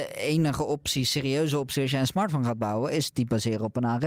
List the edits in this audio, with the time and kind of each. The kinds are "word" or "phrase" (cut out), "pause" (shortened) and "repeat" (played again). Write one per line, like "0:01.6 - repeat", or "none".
none